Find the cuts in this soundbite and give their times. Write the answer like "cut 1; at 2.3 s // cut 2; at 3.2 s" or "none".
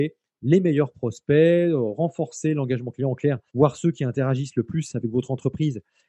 cut 1; at 3.5 s